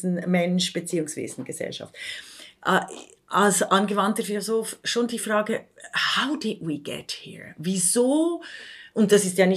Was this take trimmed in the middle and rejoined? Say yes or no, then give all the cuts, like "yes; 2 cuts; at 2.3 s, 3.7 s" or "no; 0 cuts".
no; 0 cuts